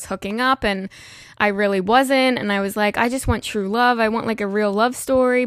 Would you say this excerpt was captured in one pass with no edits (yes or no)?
yes